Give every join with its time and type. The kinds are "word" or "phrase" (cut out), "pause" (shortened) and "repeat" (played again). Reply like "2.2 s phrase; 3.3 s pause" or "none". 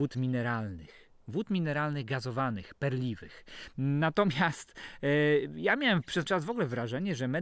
6.3 s word